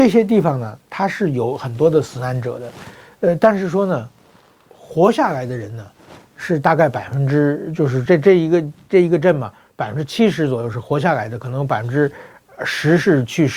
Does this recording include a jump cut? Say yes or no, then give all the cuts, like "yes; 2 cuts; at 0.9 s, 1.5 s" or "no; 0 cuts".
no; 0 cuts